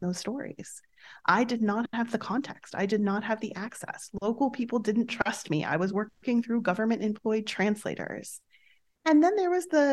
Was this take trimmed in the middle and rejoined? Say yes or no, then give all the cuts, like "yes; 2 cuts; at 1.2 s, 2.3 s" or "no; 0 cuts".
no; 0 cuts